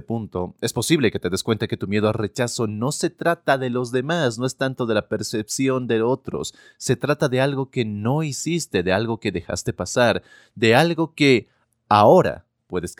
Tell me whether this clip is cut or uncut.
uncut